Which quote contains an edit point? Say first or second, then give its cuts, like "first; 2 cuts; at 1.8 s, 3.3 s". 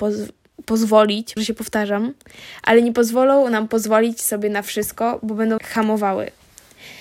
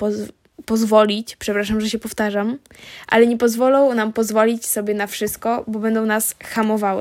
first; 2 cuts; at 1.4 s, 5.6 s